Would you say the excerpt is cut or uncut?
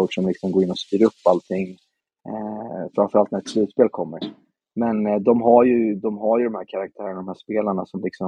uncut